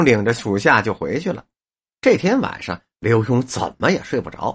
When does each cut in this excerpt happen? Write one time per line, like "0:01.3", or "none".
none

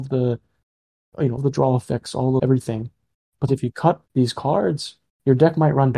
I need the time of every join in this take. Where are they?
0:01.4
0:02.4
0:03.5
0:04.1

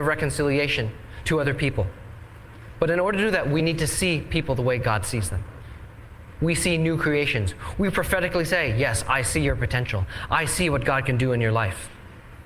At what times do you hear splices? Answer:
none

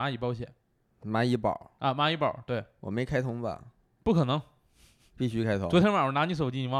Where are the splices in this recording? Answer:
none

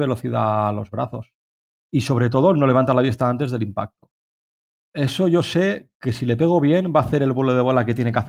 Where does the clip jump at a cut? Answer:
none

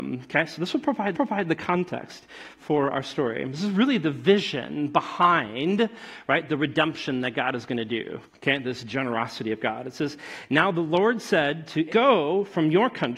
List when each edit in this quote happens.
0:01.1
0:08.3
0:11.9

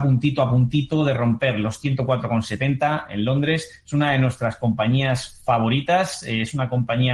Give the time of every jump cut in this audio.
none

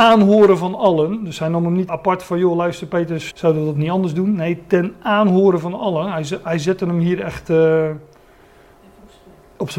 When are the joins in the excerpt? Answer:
0:01.9
0:03.3

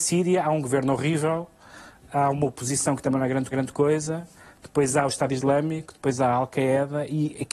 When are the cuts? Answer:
0:03.5

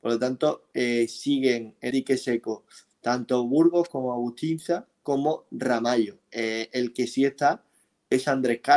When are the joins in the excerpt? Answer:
0:01.9

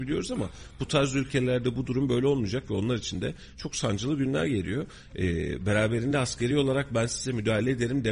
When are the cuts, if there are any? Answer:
none

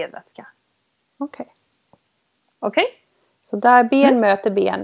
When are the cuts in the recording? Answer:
none

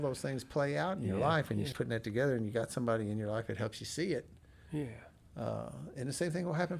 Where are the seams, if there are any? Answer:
0:01.7

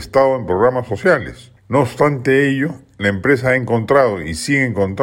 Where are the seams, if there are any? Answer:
none

